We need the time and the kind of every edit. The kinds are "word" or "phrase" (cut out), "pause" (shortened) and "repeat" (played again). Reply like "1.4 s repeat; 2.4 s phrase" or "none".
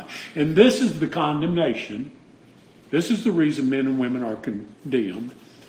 none

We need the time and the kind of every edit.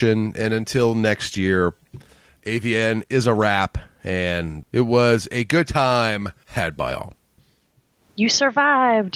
none

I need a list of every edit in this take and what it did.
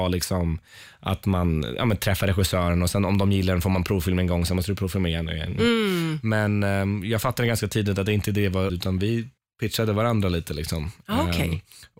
8.7 s word; 9.4 s pause

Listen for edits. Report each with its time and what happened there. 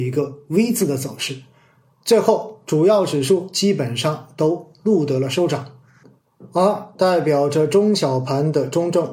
none

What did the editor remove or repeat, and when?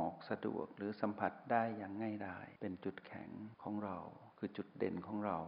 2.6 s pause; 3.5 s pause

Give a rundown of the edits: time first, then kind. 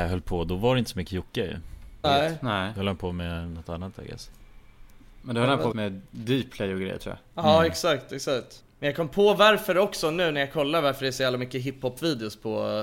2.0 s word; 5.7 s phrase; 8.7 s pause

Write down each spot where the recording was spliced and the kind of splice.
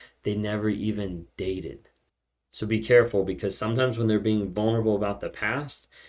2.1 s pause

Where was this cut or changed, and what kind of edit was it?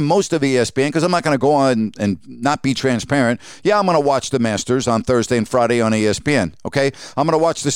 none

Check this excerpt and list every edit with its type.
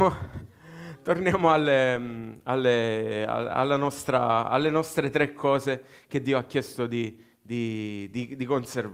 none

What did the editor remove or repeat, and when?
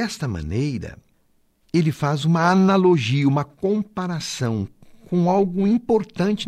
none

